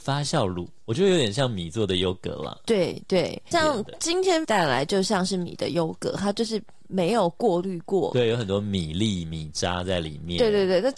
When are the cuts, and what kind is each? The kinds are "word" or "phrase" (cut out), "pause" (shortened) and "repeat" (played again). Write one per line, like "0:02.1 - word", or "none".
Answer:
0:03.5 - phrase
0:04.4 - word

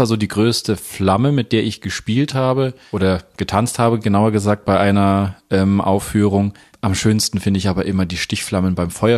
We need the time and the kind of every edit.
none

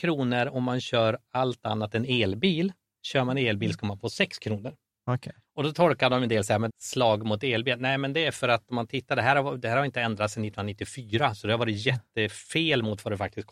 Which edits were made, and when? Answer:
0:06.7 - phrase

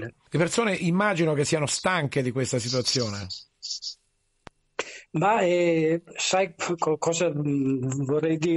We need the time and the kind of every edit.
none

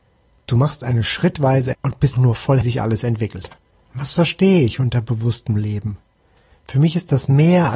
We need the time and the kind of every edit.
0:01.7 - phrase
0:02.1 - word
0:02.6 - phrase
0:03.6 - pause

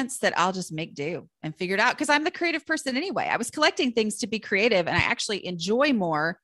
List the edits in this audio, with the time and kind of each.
none

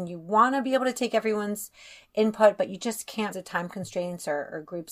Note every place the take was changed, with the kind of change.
0:03.3 - word

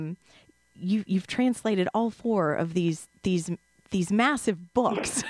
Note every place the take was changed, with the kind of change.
none

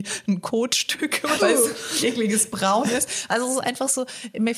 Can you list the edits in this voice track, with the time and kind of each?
0:01.4 - phrase
0:02.0 - word

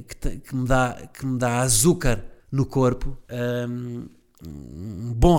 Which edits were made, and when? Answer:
0:02.4 - pause
0:03.2 - pause

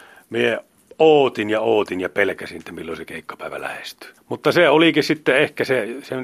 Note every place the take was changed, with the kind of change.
0:04.2 - pause

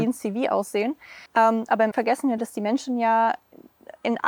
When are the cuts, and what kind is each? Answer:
0:01.3 - pause
0:01.9 - word
0:02.4 - word

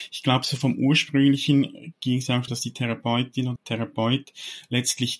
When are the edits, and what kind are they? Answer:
0:02.5 - word
0:03.6 - word

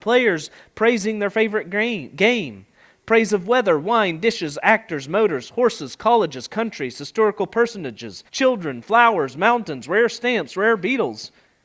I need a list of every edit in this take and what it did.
0:08.3 - pause

